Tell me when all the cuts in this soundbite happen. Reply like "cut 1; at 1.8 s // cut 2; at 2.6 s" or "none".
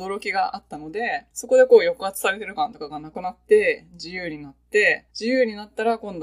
cut 1; at 1.3 s // cut 2; at 5.1 s